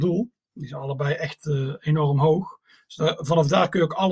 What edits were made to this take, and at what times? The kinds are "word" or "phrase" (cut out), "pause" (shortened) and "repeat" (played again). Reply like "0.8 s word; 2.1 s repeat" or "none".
none

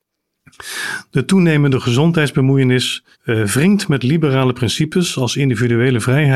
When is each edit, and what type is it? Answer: 3.1 s pause

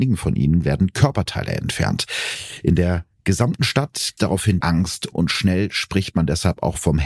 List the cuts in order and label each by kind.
4.2 s word; 4.6 s word; 5.1 s word

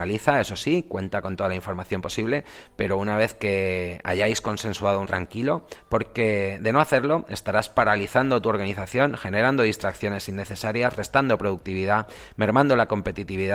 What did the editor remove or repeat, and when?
5.1 s phrase

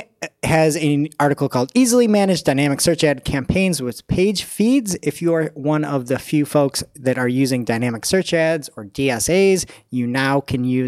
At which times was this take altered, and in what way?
none

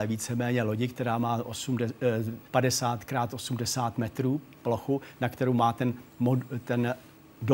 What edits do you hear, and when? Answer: 2.4 s pause

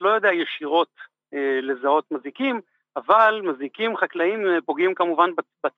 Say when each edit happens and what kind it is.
none

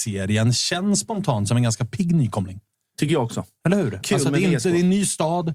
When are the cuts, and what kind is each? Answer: none

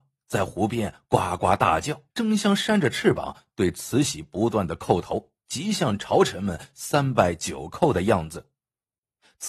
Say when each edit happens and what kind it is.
2.1 s pause; 5.4 s pause

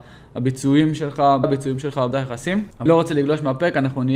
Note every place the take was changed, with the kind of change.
1.4 s word; 2.1 s word; 2.9 s word

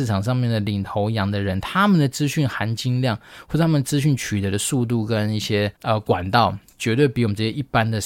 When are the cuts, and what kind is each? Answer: 5.8 s pause

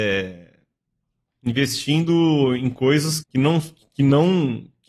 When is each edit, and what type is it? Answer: 3.2 s word

